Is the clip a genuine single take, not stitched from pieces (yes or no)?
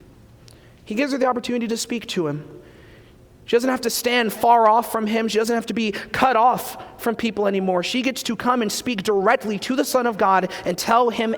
yes